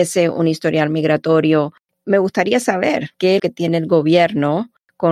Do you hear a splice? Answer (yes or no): yes